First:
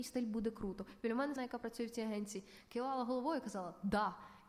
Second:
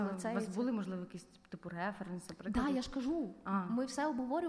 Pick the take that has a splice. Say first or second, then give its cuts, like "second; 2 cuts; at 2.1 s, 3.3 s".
first; 1 cut; at 1.4 s